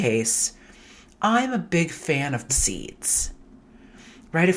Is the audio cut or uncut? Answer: cut